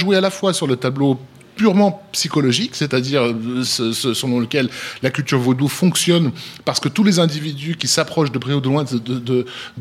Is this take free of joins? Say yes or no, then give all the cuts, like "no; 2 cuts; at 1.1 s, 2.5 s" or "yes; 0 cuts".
no; 1 cut; at 3.6 s